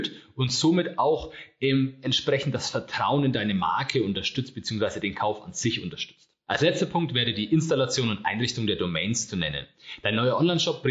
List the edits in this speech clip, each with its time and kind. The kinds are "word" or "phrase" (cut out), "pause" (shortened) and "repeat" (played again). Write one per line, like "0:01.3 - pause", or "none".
none